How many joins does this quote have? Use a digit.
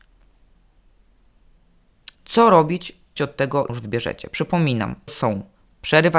4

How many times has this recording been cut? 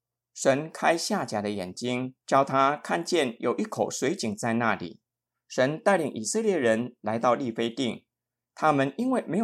1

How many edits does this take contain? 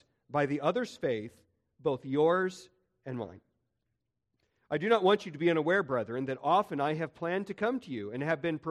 0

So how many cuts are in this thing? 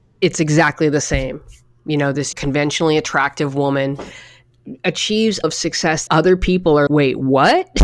4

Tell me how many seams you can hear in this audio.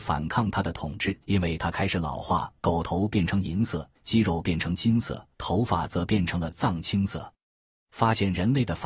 4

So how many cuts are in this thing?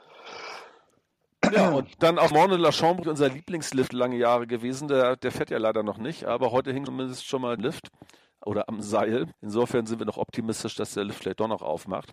6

